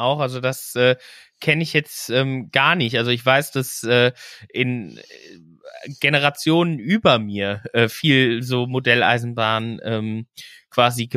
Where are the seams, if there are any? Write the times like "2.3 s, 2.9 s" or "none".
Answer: none

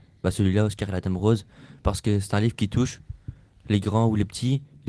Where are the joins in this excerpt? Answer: none

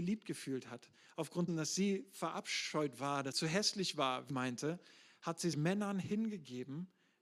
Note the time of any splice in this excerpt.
1.5 s, 3.3 s, 4.3 s, 5.5 s

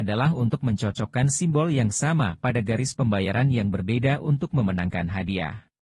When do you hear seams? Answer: none

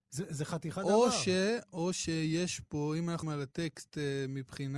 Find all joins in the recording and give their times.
3.2 s

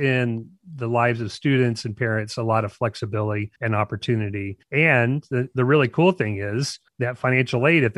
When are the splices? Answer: 3.6 s, 4.6 s, 6.9 s

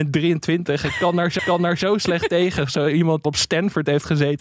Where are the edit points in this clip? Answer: 1.4 s, 3.2 s

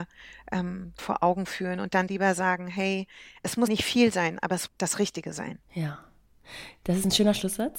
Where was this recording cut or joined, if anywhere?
1.0 s, 2.1 s, 3.7 s, 4.7 s, 5.6 s

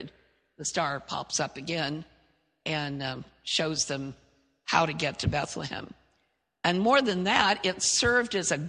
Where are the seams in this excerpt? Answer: none

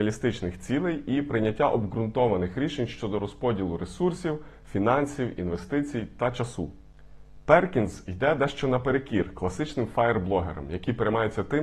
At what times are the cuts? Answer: none

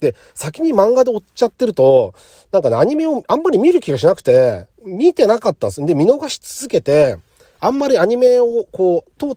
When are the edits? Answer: none

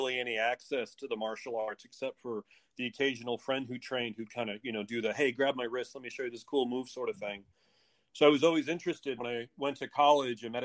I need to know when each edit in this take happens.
9.2 s

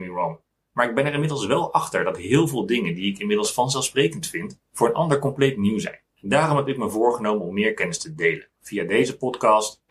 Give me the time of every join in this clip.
4.7 s, 6.1 s, 8.5 s

